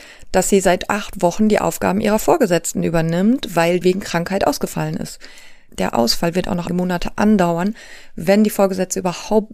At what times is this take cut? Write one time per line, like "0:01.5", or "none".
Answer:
0:03.8
0:06.7